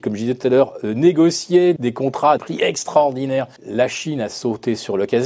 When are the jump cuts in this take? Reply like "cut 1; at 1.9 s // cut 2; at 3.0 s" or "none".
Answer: cut 1; at 1.8 s // cut 2; at 2.4 s // cut 3; at 3.6 s